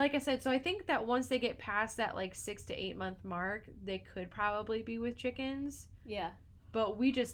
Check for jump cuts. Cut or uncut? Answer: uncut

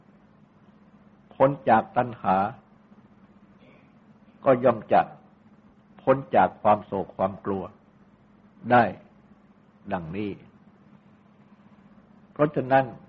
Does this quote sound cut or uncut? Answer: uncut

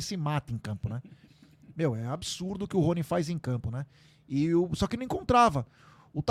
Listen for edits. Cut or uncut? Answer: uncut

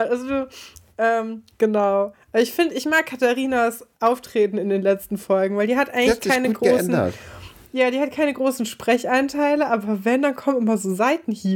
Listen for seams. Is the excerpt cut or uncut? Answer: uncut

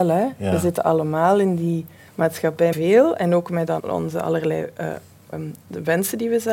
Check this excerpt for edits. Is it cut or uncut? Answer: cut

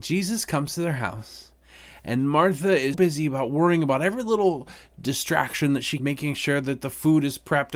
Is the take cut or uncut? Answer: cut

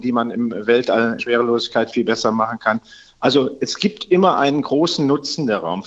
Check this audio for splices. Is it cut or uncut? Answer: cut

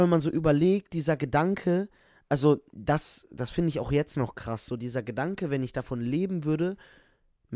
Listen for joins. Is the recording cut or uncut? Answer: uncut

